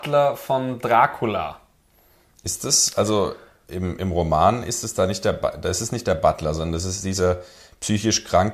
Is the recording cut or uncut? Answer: uncut